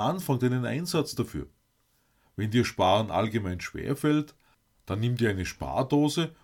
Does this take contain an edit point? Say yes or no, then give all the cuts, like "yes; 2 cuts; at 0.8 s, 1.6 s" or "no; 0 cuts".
no; 0 cuts